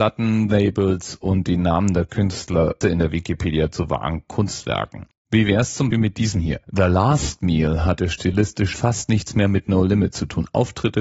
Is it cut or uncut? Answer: cut